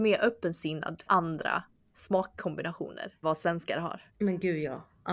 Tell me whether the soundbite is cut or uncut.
cut